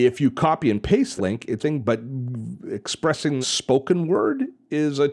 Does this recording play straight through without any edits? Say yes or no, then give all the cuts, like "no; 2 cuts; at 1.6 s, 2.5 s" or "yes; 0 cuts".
no; 3 cuts; at 1.2 s, 1.6 s, 3.4 s